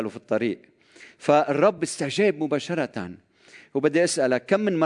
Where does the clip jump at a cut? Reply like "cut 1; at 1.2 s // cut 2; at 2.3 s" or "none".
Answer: none